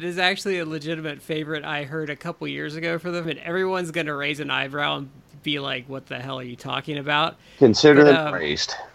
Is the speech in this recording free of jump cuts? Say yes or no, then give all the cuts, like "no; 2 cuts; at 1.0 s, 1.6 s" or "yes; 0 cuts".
no; 1 cut; at 3.2 s